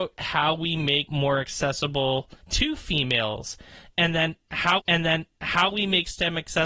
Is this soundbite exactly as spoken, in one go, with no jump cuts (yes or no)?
no